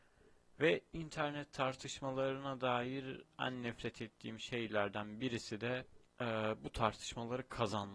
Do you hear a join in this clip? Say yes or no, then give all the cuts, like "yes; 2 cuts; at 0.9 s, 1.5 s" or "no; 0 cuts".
yes; 1 cut; at 6.1 s